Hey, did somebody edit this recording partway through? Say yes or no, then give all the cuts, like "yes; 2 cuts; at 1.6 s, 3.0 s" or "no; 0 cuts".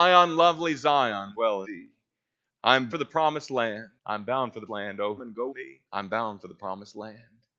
yes; 8 cuts; at 1.3 s, 1.6 s, 2.9 s, 4.0 s, 4.7 s, 5.2 s, 5.5 s, 5.9 s